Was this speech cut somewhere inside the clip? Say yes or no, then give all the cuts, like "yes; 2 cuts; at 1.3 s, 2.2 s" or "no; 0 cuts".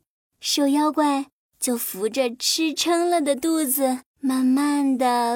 yes; 1 cut; at 4.1 s